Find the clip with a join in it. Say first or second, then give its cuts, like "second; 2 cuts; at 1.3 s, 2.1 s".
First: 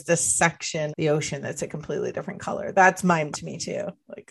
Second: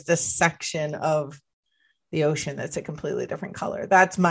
first; 2 cuts; at 0.9 s, 3.3 s